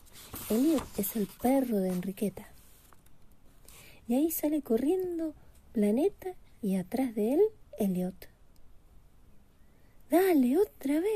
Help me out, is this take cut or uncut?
uncut